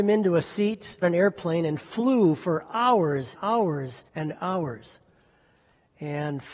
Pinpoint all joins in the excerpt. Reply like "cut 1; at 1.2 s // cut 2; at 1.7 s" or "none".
cut 1; at 1.0 s // cut 2; at 3.3 s // cut 3; at 4.1 s